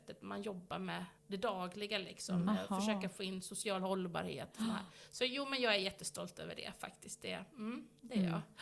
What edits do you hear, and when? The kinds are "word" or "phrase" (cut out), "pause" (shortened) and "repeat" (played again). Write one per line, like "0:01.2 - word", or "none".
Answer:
0:01.2 - pause